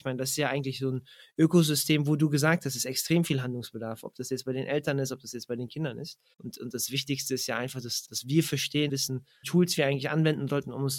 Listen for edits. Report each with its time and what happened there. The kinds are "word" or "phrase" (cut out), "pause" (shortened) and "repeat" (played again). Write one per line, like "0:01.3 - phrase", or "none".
0:06.3 - pause
0:08.1 - word
0:08.9 - word
0:09.4 - word